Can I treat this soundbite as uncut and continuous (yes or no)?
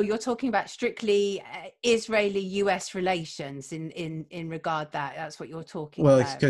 yes